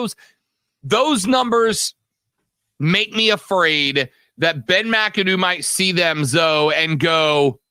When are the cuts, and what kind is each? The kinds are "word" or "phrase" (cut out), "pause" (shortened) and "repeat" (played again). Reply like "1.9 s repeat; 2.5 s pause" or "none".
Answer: none